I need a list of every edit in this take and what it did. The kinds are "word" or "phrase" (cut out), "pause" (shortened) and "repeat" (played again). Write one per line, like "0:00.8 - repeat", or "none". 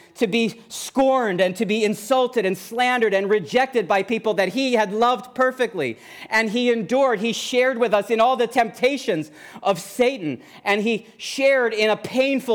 none